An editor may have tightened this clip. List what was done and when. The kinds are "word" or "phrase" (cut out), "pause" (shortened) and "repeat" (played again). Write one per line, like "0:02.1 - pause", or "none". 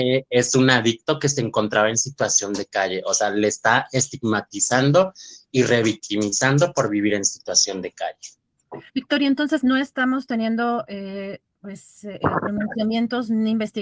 0:08.9 - pause